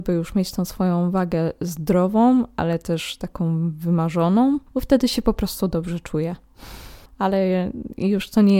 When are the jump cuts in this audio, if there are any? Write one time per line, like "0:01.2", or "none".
0:04.7
0:07.1